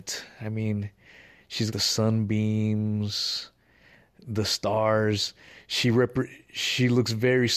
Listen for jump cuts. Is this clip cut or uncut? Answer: cut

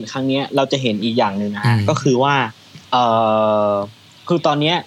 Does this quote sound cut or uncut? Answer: cut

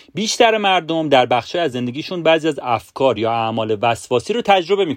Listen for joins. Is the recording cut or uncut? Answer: uncut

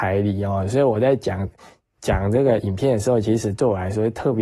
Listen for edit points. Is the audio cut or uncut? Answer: uncut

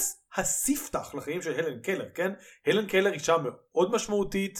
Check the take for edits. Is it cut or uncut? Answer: uncut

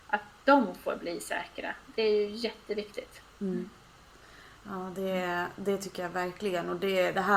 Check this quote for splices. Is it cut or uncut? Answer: uncut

